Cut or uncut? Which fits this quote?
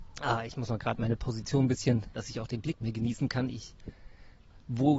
cut